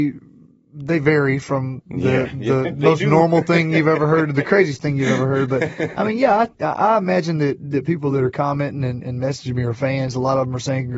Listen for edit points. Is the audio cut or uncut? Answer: uncut